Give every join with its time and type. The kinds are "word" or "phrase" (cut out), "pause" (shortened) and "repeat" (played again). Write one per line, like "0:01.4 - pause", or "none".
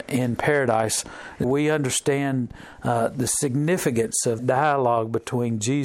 0:01.4 - word
0:04.4 - word